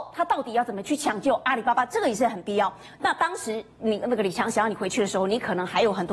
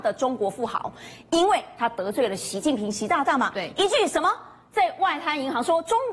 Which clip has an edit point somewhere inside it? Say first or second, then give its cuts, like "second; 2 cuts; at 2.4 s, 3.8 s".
first; 1 cut; at 3.8 s